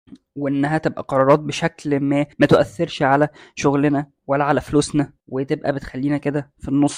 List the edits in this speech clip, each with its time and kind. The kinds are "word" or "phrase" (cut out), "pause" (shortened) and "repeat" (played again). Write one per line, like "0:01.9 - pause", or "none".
0:02.3 - pause
0:04.2 - pause
0:05.2 - pause

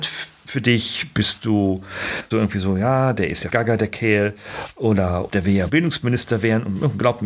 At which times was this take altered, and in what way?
0:02.3 - word
0:03.5 - word
0:05.3 - word
0:05.7 - word

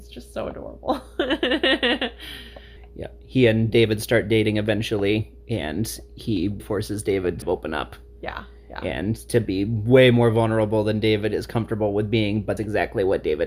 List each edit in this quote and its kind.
0:06.6 - word
0:07.4 - phrase
0:12.6 - word

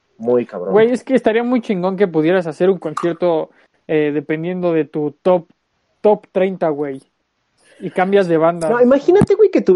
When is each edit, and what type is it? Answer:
none

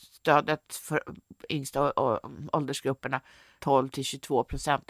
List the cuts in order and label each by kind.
0:01.5 - phrase
0:03.6 - word

